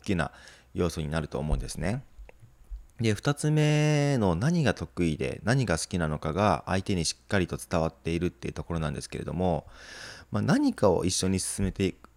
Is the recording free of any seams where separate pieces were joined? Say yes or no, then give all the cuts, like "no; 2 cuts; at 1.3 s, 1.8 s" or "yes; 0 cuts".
no; 1 cut; at 2.9 s